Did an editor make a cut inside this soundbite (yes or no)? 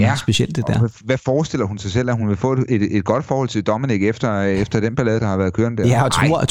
no